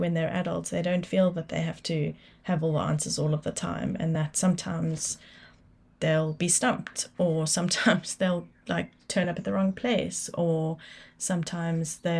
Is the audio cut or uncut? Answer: uncut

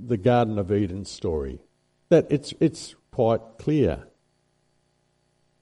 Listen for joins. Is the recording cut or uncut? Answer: uncut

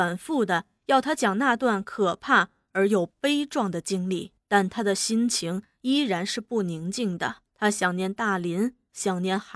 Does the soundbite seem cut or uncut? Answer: cut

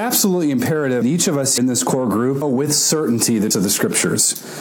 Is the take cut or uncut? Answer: cut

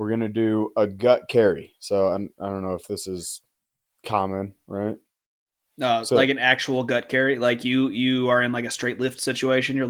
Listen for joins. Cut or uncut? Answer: uncut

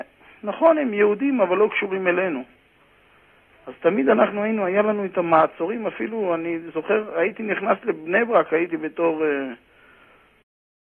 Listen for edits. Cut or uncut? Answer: uncut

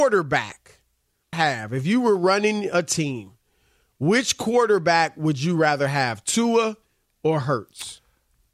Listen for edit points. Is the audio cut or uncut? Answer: cut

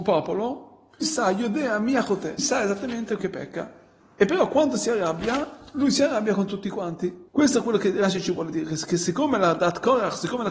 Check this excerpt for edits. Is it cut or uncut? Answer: cut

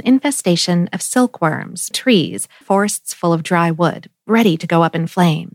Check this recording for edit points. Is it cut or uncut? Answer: cut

